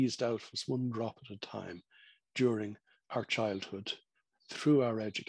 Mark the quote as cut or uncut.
uncut